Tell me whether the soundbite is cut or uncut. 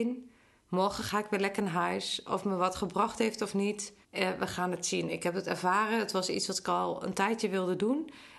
cut